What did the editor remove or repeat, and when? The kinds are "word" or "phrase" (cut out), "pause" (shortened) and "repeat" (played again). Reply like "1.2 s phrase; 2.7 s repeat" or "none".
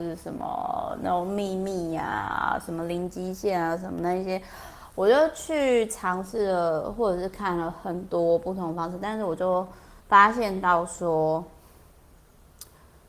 10.0 s pause

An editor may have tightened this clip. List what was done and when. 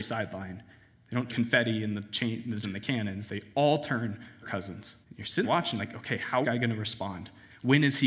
1.3 s phrase; 2.6 s word; 4.4 s phrase; 5.0 s pause; 5.4 s word; 5.8 s word; 6.4 s phrase

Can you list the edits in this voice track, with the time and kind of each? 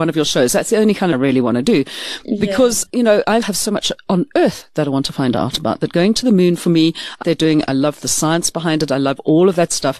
1.1 s phrase; 3.4 s word; 7.2 s phrase

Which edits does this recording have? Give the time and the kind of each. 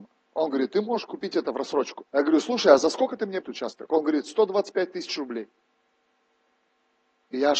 2.1 s pause; 3.4 s phrase

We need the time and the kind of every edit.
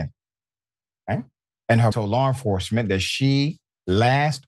1.5 s pause; 1.9 s phrase

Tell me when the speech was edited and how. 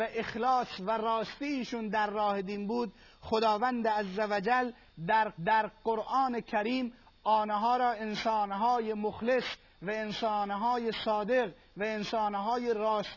5.4 s repeat

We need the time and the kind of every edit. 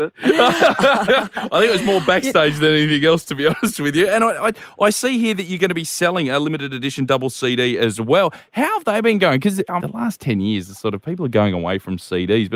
9.8 s phrase

